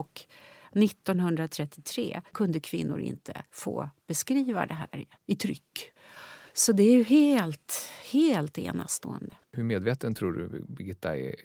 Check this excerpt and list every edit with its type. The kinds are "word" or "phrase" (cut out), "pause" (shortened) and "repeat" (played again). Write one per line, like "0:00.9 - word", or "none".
0:02.3 - pause
0:03.5 - pause
0:05.1 - pause
0:06.5 - pause
0:09.4 - pause